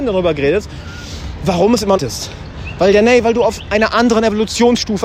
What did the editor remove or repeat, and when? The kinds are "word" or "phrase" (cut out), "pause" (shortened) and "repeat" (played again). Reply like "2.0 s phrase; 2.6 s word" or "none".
2.0 s phrase